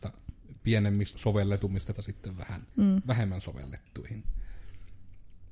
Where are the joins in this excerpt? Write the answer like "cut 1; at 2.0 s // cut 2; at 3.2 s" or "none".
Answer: cut 1; at 1.1 s // cut 2; at 1.9 s // cut 3; at 2.7 s